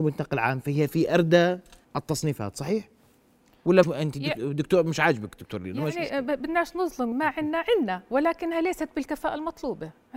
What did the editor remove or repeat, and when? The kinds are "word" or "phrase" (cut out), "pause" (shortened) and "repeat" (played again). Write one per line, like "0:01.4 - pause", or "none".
0:01.8 - pause
0:03.8 - word
0:07.1 - word